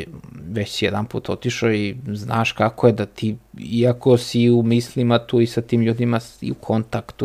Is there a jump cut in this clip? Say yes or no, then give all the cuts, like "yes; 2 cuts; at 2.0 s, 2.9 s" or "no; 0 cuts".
no; 0 cuts